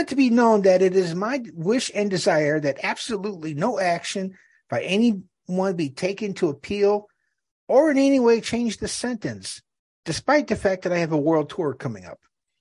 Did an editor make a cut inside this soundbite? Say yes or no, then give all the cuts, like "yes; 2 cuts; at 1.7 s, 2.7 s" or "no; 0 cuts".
no; 0 cuts